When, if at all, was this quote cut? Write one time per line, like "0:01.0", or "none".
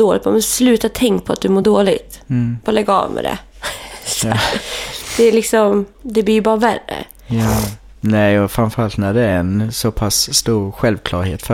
none